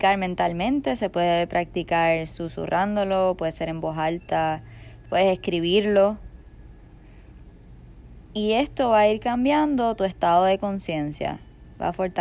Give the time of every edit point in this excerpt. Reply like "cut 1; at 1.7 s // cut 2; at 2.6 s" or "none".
none